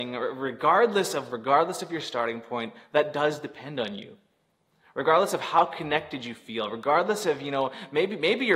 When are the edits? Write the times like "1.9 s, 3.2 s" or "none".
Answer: 1.3 s

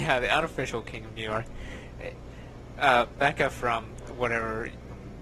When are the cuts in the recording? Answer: none

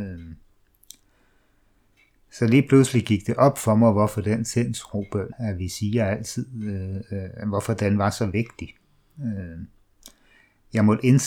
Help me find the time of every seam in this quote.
5.3 s

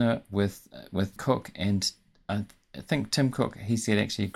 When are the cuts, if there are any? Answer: 1.2 s

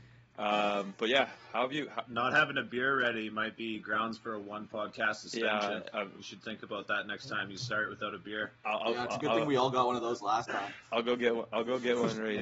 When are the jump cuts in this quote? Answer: 2.0 s

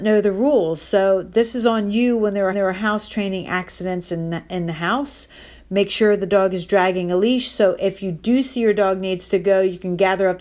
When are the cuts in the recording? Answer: 2.5 s

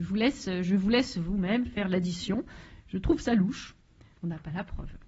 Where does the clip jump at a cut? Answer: none

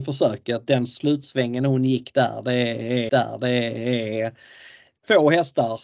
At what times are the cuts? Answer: 3.1 s

